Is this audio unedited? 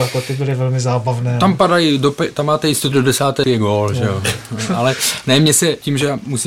no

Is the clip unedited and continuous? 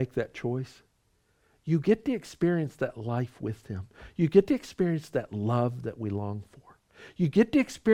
yes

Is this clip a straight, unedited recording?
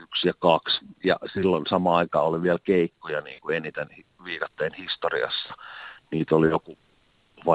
yes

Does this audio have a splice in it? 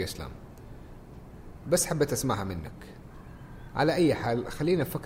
no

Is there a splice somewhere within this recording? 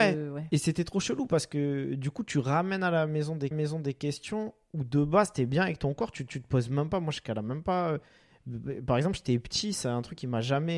yes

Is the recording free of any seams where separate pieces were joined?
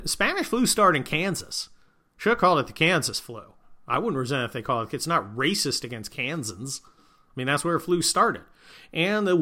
yes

